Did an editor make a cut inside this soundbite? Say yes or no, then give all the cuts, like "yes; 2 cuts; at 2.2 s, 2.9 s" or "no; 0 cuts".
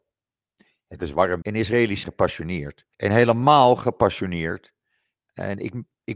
yes; 3 cuts; at 1.4 s, 2.0 s, 2.9 s